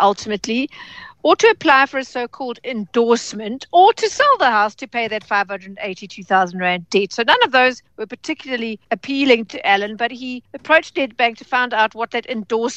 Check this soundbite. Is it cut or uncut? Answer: cut